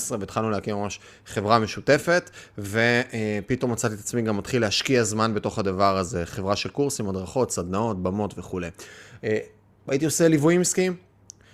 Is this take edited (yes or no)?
no